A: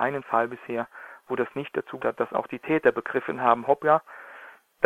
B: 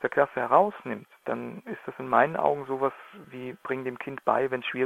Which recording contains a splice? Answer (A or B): A